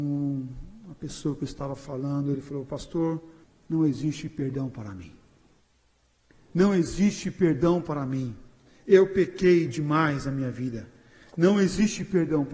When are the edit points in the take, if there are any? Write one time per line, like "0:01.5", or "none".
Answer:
0:03.4